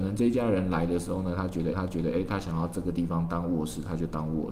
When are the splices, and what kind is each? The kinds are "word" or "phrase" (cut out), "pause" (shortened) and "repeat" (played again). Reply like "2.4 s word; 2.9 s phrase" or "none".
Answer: 1.7 s repeat